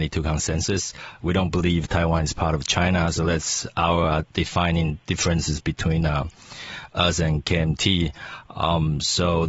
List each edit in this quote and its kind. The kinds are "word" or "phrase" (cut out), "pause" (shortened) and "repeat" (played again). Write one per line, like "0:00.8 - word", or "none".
none